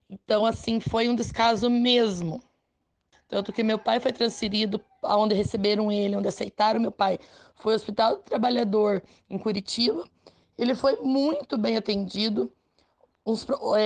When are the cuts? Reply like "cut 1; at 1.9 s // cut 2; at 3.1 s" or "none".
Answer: none